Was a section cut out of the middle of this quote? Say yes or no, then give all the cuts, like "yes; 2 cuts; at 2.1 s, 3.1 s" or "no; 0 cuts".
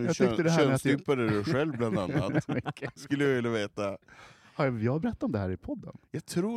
no; 0 cuts